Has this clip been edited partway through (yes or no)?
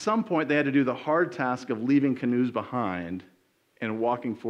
no